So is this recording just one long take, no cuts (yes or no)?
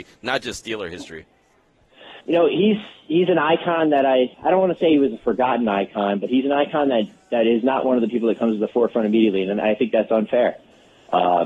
no